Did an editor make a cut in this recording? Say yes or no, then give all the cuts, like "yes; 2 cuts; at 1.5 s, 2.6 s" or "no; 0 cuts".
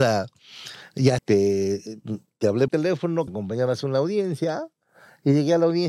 yes; 3 cuts; at 1.2 s, 2.7 s, 3.3 s